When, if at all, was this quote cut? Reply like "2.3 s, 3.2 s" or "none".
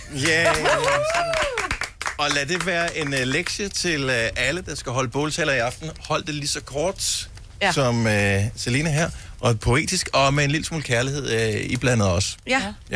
none